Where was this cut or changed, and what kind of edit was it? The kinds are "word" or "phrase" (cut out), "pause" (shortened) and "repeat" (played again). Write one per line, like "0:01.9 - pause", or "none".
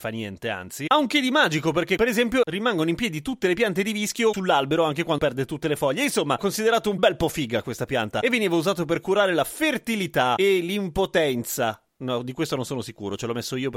0:05.2 - word
0:06.4 - word